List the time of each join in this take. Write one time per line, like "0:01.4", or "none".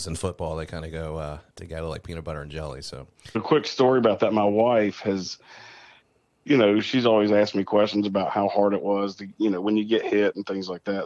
0:03.3